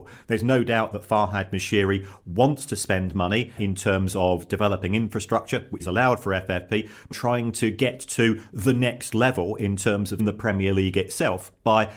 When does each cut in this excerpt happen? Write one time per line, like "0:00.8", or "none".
0:03.6
0:05.8
0:07.1
0:10.2